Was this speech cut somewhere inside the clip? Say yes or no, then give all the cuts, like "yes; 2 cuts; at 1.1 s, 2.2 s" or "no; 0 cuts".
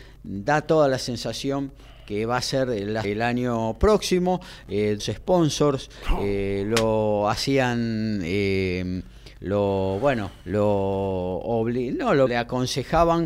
yes; 4 cuts; at 3.0 s, 5.0 s, 10.4 s, 12.3 s